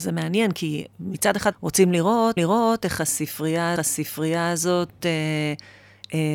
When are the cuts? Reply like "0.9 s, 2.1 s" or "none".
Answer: 1.5 s, 2.4 s, 3.8 s

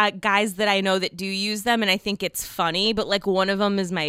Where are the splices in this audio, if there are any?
none

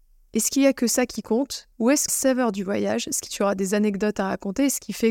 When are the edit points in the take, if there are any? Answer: 1.7 s, 2.1 s, 3.3 s

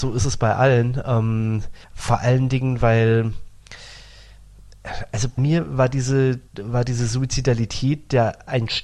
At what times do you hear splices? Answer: 1.8 s, 5.4 s, 6.5 s

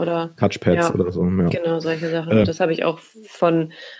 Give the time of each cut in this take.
2.4 s

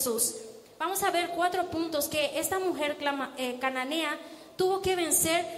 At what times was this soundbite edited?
none

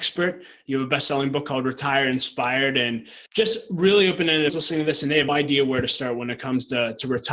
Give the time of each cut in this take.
3.3 s, 4.5 s, 5.3 s

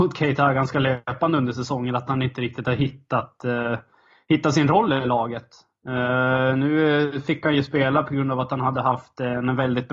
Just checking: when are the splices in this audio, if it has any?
none

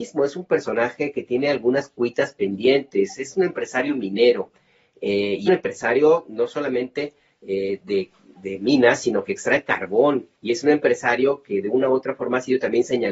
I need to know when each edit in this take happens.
5.5 s, 10.4 s

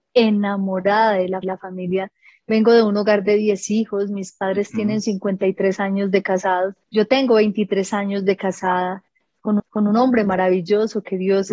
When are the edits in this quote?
1.4 s, 6.9 s, 9.6 s

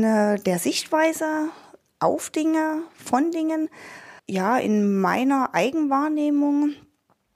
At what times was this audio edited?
4.2 s

